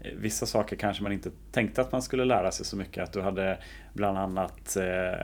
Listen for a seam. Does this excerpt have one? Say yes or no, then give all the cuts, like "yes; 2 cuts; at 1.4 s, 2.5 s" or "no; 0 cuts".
no; 0 cuts